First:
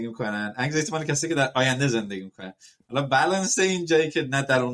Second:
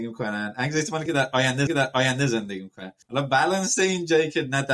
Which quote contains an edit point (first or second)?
second